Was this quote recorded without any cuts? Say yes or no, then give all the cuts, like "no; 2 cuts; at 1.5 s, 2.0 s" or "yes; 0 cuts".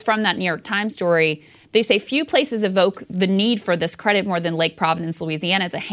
yes; 0 cuts